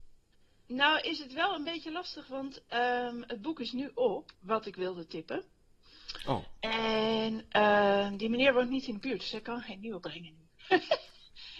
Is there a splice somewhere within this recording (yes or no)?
yes